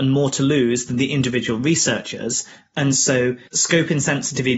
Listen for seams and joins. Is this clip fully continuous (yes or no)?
yes